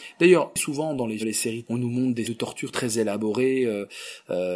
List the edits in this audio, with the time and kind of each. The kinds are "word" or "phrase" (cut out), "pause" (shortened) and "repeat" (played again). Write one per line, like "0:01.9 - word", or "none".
0:01.2 - word
0:01.6 - word
0:02.2 - word